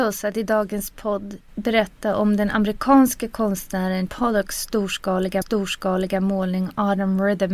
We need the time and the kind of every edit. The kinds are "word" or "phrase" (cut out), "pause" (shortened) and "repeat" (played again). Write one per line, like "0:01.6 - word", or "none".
0:04.1 - word
0:05.4 - repeat